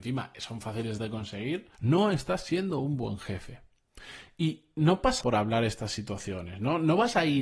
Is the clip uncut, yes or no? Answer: no